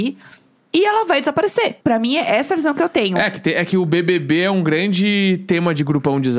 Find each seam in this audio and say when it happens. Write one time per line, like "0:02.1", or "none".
0:01.8